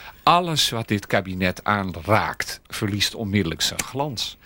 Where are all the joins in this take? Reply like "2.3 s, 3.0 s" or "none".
none